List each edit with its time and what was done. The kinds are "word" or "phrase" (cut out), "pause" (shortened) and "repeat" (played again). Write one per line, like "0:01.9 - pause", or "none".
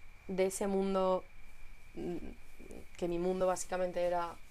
none